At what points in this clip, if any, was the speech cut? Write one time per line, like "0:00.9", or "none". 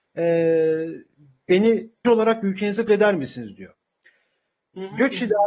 0:02.0
0:02.9